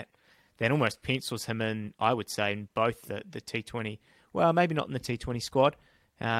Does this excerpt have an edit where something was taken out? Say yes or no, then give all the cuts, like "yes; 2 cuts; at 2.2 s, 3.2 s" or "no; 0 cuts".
no; 0 cuts